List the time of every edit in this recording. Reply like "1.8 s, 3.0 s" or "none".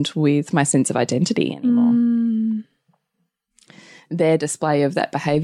none